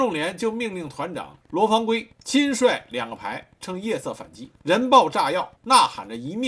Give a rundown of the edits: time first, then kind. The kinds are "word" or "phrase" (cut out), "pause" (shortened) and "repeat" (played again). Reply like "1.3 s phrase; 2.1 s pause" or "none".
1.4 s pause; 2.1 s pause; 4.6 s pause; 5.6 s pause

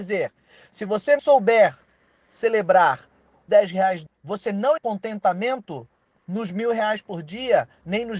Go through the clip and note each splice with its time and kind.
1.2 s word; 3.5 s word; 4.1 s phrase; 4.8 s word

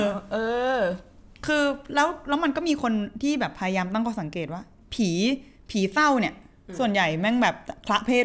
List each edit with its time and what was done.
none

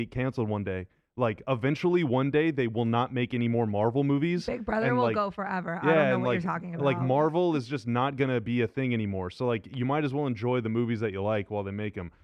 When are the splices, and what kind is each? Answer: none

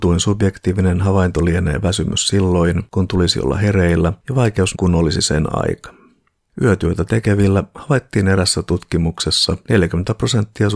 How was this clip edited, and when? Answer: 4.7 s word

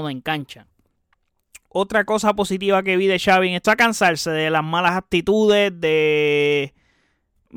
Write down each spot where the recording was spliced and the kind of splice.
3.6 s phrase

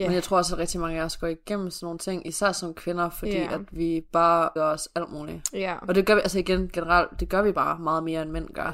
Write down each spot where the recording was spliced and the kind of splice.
4.6 s word

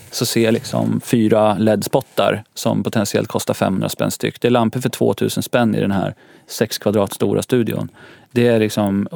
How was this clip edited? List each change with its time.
none

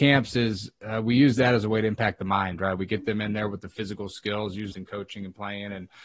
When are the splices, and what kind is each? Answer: 4.7 s phrase

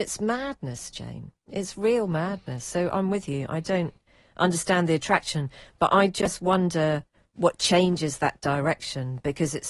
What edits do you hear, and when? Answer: none

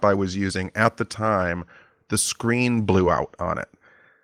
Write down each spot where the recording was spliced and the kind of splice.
none

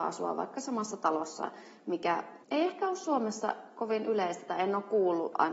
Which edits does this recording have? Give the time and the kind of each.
2.4 s pause

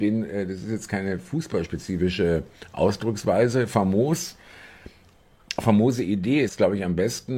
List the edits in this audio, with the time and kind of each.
6.5 s word

